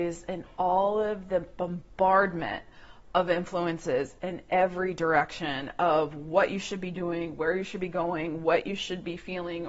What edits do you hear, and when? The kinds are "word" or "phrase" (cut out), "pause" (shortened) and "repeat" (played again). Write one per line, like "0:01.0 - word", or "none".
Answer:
none